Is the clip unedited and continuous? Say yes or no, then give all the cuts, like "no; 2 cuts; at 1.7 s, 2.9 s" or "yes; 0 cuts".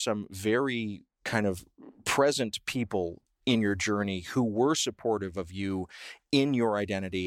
yes; 0 cuts